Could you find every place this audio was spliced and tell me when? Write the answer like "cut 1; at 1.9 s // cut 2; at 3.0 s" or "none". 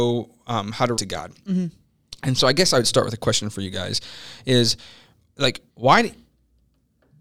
cut 1; at 1.0 s // cut 2; at 5.7 s